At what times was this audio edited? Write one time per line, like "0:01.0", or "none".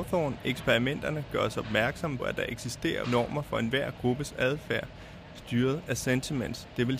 0:02.2
0:03.0